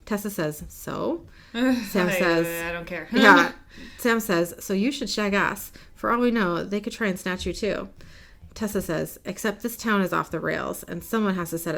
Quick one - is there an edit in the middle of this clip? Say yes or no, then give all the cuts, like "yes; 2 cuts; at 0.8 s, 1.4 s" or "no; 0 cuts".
no; 0 cuts